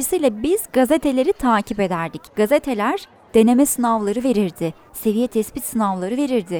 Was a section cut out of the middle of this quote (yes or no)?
yes